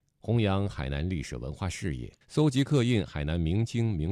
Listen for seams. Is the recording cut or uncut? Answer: cut